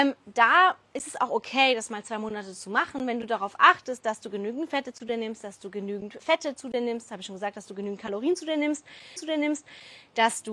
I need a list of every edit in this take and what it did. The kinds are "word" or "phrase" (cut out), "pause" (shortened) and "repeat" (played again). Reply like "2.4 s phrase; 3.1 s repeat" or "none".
6.2 s word; 9.2 s repeat